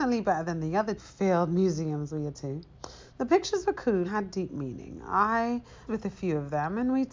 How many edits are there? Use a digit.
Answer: 4